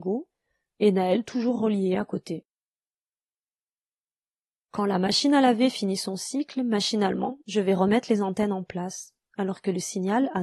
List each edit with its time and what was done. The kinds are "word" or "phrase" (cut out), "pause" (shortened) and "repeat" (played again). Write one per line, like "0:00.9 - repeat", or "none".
none